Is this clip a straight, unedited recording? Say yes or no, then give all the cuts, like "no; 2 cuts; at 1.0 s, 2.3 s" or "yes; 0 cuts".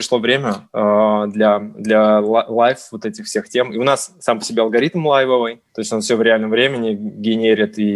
no; 1 cut; at 5.7 s